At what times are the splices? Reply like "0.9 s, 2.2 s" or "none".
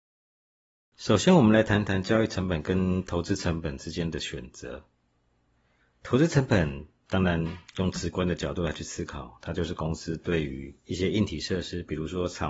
10.8 s